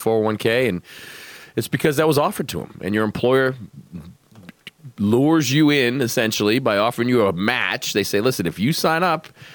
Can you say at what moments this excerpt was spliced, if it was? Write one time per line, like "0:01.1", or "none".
none